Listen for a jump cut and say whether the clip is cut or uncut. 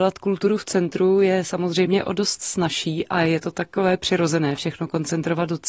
uncut